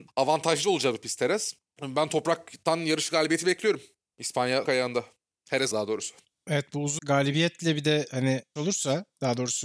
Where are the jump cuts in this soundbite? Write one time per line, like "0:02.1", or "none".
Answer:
0:04.7
0:05.7
0:07.0
0:08.6